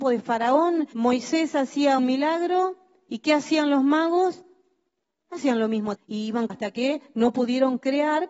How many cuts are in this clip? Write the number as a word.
four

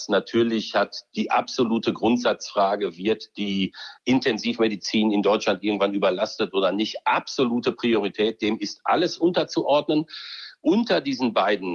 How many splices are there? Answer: zero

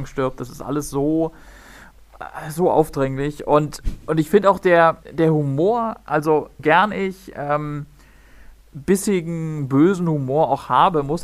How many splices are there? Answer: two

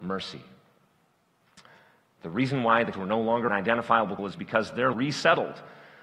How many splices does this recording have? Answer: four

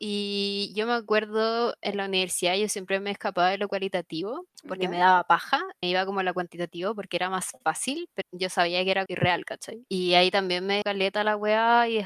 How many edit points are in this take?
four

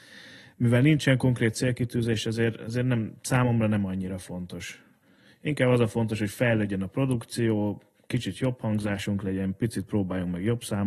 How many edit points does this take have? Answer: zero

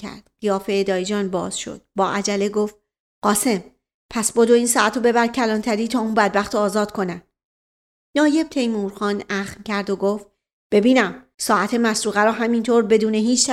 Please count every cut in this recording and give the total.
one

